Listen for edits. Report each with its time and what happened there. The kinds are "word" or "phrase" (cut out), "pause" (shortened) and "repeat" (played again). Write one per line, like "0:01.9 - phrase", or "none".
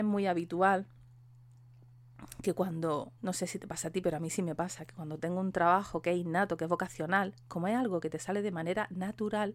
0:03.2 - pause